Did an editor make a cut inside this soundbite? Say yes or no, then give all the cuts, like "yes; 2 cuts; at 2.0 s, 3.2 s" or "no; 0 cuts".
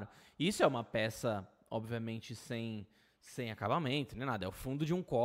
no; 0 cuts